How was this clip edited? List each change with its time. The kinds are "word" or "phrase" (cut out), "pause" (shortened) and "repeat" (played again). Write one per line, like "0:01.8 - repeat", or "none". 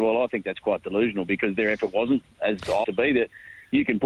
0:02.8 - phrase